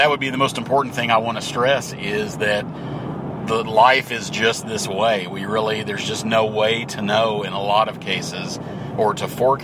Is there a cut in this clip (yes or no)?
no